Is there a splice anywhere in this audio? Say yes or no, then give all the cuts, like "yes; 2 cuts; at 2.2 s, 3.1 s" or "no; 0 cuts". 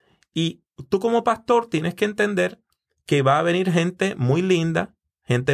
no; 0 cuts